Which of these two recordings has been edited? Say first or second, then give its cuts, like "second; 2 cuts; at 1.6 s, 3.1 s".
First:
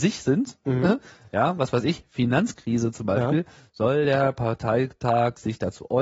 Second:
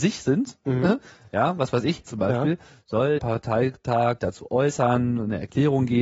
second; 3 cuts; at 2.1 s, 3.2 s, 4.2 s